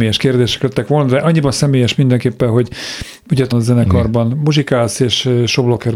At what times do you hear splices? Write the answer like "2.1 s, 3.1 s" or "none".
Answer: 3.5 s